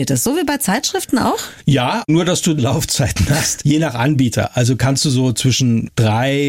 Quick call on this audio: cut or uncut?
cut